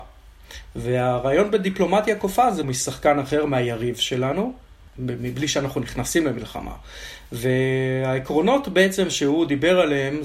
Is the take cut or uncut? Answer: cut